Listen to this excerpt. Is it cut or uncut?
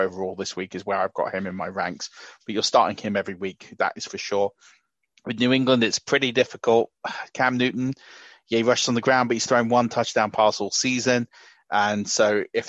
uncut